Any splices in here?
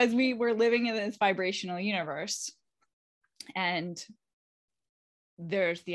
no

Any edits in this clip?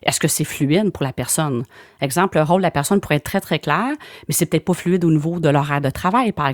no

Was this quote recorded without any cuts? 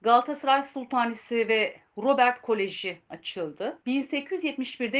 yes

